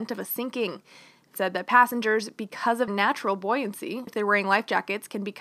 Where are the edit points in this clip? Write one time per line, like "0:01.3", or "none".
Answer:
0:01.3
0:02.9
0:04.1